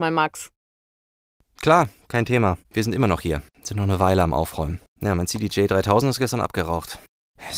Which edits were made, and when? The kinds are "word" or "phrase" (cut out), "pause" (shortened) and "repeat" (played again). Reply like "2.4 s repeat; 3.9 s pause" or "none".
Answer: 2.6 s pause; 3.5 s pause; 4.9 s pause